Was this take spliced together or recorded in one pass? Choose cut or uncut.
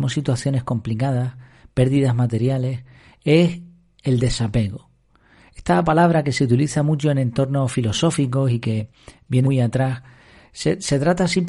cut